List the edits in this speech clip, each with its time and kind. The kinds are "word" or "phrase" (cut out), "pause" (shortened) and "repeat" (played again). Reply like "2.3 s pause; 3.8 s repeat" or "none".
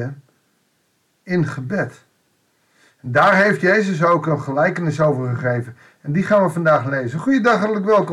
none